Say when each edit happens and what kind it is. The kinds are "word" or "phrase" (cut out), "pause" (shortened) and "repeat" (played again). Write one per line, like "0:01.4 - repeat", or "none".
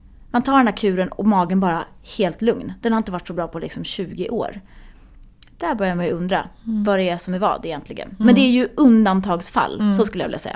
none